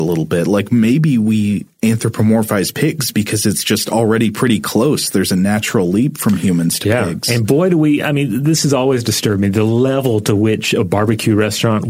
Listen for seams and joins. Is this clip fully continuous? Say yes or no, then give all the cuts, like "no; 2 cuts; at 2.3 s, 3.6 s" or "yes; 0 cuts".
yes; 0 cuts